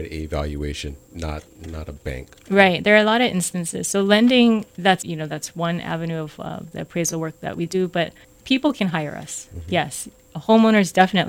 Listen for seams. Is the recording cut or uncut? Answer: cut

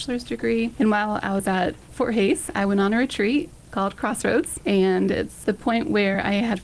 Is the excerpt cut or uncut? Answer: cut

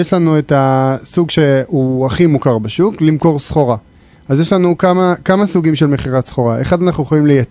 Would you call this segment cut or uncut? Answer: uncut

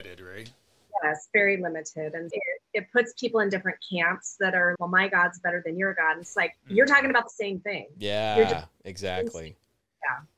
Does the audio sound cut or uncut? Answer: cut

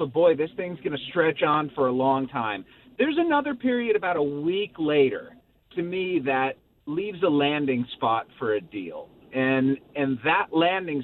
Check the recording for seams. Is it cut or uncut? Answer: uncut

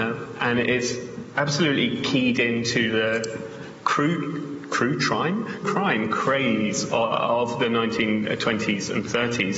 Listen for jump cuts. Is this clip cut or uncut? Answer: cut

